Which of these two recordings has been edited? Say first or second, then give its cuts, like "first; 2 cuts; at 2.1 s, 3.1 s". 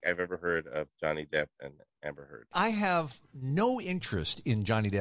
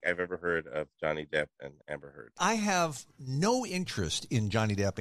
second; 1 cut; at 1.8 s